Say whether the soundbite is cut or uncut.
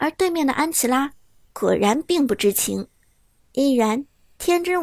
uncut